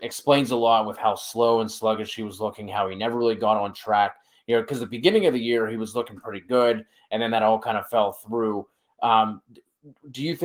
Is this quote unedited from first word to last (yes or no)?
yes